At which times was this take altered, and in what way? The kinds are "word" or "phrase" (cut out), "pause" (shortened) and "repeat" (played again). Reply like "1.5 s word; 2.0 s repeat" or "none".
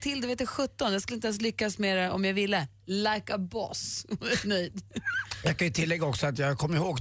none